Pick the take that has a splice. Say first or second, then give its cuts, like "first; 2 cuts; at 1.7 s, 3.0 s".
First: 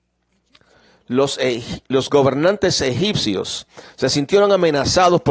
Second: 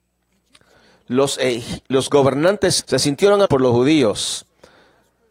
second; 2 cuts; at 2.8 s, 3.5 s